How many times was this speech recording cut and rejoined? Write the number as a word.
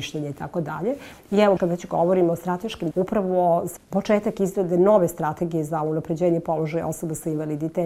three